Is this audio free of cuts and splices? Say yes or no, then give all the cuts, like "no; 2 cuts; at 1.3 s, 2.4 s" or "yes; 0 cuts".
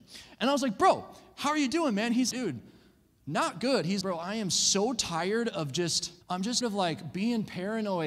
no; 4 cuts; at 2.3 s, 4.0 s, 6.2 s, 6.6 s